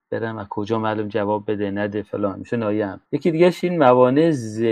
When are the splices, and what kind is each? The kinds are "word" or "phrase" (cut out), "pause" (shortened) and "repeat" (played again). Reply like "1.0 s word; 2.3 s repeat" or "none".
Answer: 3.1 s pause